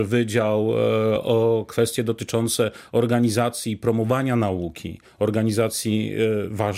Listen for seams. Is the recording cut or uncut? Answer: uncut